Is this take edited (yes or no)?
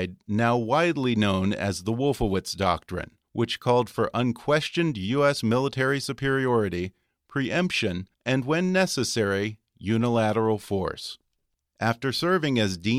yes